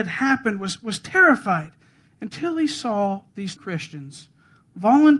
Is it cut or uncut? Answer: cut